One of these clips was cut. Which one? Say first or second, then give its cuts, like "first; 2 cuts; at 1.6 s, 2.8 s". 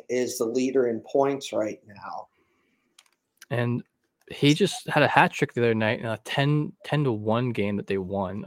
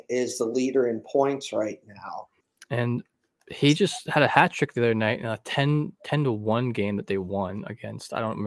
second; 1 cut; at 2.4 s